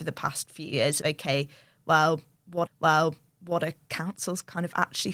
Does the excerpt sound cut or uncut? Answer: cut